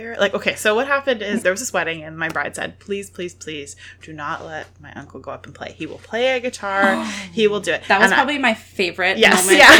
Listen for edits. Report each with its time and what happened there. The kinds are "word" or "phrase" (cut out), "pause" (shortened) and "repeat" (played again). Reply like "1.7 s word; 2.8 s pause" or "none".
1.4 s word